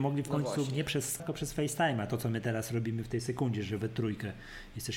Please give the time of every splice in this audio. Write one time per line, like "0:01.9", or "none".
0:01.2